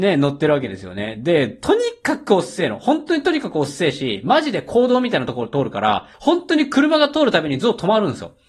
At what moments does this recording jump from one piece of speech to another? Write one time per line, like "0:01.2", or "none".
0:06.1